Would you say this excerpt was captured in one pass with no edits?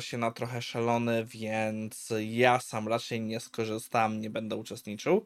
yes; 0 cuts

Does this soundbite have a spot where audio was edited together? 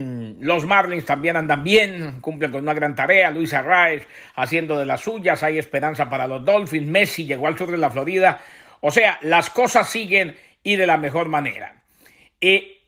no; 0 cuts

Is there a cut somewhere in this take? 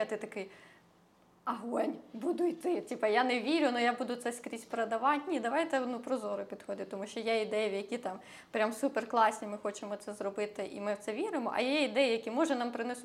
no; 0 cuts

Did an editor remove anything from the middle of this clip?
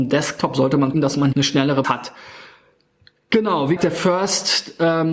yes; 4 cuts; at 0.9 s, 1.3 s, 1.8 s, 3.8 s

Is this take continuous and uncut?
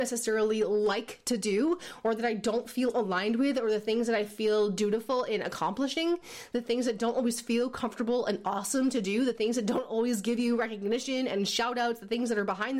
yes; 0 cuts

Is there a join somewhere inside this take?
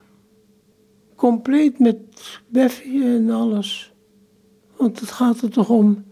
no; 0 cuts

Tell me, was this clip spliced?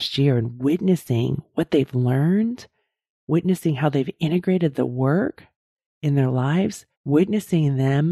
yes; 1 cut; at 6.9 s

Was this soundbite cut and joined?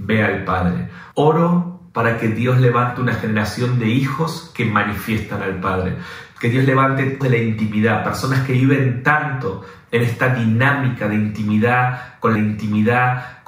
yes; 3 cuts; at 1.1 s, 7.2 s, 12.4 s

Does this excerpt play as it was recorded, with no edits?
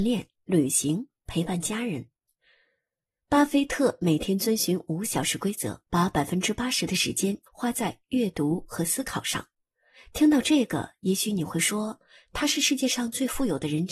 no; 2 cuts; at 5.9 s, 7.5 s

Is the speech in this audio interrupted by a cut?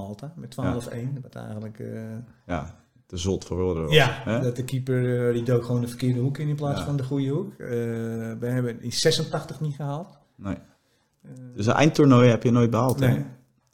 no; 0 cuts

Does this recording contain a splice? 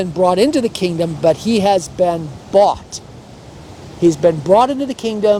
no; 0 cuts

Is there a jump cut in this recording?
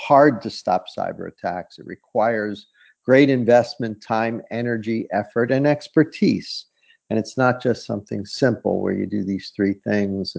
no; 0 cuts

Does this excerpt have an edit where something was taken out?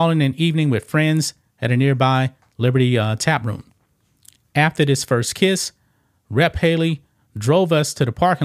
no; 0 cuts

